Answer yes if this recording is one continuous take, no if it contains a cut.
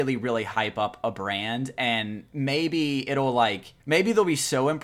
no